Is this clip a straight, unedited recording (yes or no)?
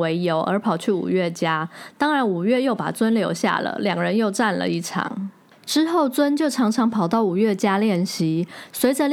yes